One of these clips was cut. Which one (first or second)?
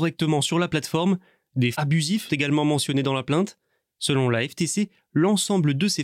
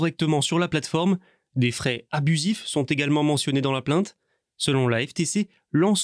first